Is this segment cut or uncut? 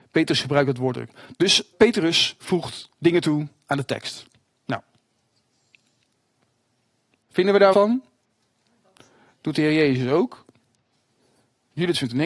cut